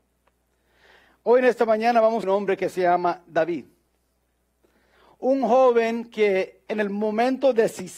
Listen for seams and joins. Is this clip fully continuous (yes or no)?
no